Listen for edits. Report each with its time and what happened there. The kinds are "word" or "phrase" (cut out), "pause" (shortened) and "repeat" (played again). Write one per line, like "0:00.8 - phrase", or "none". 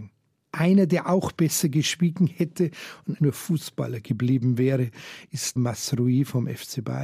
0:03.2 - word
0:05.6 - word